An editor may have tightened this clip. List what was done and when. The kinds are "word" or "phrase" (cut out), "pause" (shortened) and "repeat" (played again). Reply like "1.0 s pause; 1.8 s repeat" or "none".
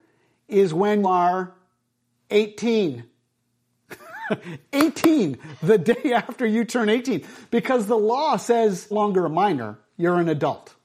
1.0 s word; 8.9 s phrase